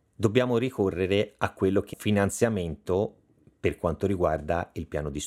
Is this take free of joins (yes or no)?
no